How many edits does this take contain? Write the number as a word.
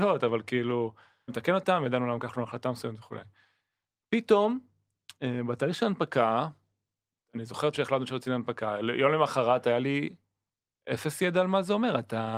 three